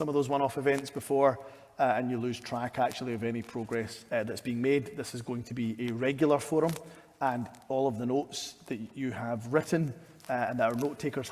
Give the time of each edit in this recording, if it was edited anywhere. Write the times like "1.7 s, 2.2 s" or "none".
4.1 s

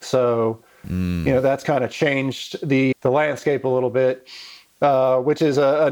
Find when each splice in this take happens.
2.9 s

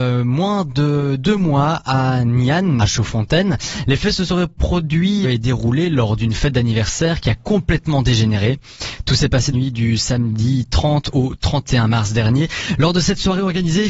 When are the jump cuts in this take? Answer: 2.8 s, 5.2 s, 9.5 s

